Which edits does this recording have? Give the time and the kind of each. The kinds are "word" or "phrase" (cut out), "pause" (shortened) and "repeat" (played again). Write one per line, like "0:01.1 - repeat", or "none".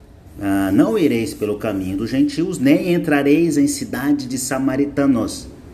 none